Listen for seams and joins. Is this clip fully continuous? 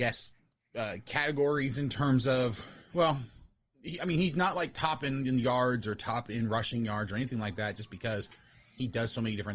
yes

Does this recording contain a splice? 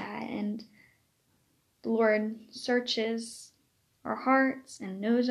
no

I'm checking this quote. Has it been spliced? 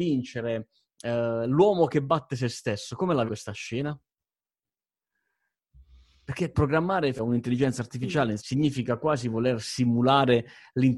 yes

